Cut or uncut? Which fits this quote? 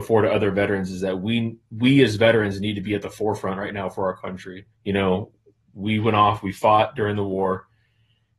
cut